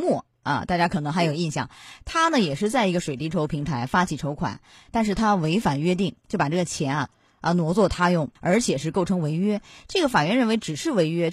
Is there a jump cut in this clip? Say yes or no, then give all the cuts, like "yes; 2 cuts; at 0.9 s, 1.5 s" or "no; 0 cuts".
yes; 1 cut; at 8.4 s